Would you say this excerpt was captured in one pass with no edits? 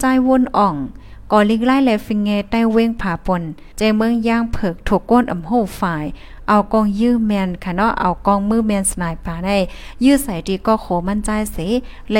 no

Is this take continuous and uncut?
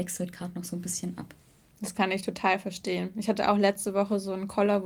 yes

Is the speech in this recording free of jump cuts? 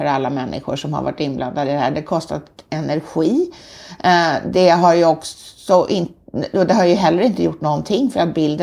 yes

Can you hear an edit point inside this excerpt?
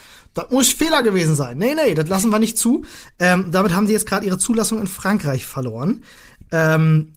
no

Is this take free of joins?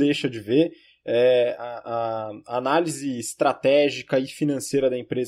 yes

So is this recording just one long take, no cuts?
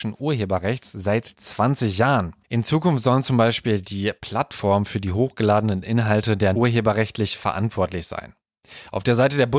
no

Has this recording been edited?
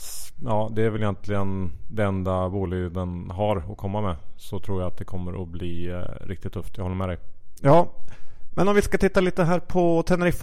no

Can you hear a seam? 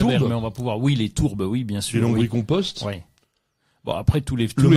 no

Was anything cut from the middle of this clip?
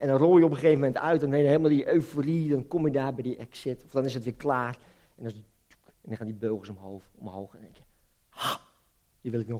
no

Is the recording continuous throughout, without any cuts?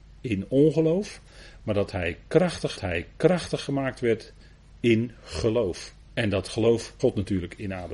no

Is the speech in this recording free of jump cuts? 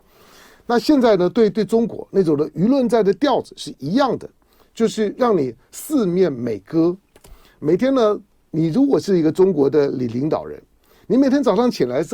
yes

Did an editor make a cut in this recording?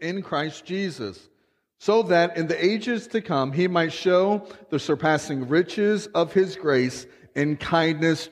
no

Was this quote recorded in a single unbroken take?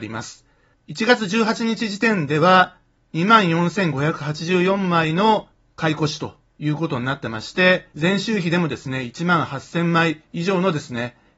no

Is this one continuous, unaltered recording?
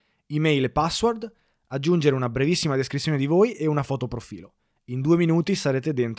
yes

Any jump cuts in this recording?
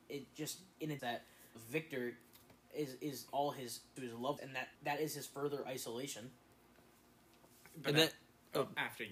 yes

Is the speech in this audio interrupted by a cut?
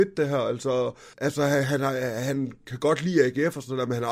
yes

